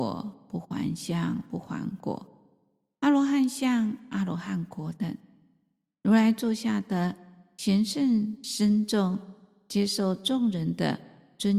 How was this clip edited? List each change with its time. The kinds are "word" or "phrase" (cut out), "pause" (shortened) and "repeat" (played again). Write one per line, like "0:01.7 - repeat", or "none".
none